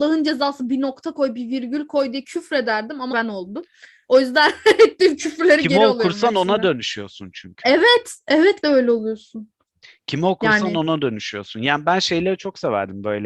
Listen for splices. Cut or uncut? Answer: cut